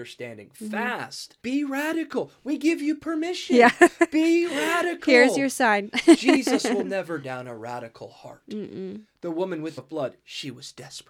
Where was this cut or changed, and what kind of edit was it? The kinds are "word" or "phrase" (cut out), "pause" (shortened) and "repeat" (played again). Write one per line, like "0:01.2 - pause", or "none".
0:01.4 - pause
0:07.2 - word
0:09.8 - phrase